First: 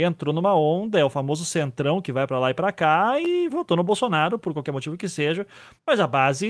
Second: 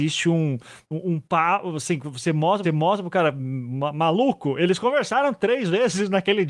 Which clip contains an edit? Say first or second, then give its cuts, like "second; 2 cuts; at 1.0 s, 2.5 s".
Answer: second; 1 cut; at 2.6 s